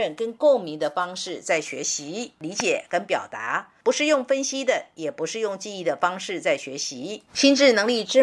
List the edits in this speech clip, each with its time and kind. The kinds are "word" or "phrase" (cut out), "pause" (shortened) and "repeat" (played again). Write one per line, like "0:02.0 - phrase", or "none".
0:07.3 - pause